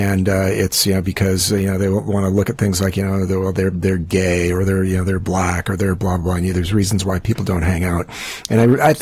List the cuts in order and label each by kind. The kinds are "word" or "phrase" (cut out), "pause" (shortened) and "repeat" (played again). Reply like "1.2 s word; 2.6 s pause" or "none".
none